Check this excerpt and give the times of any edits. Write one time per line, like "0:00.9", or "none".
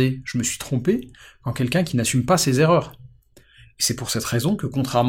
none